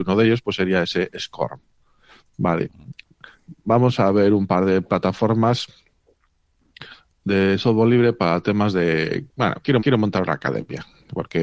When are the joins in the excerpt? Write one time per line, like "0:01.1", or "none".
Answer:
0:09.8